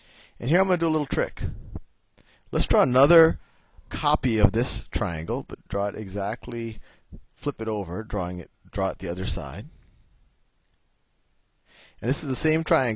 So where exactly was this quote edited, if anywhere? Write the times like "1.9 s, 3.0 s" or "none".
5.7 s